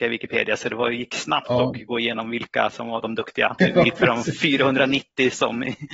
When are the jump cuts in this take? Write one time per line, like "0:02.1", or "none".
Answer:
0:03.6

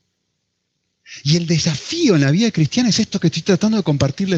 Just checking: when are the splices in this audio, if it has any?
none

